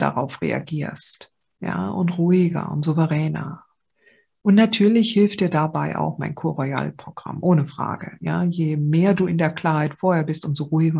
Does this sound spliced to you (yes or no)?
no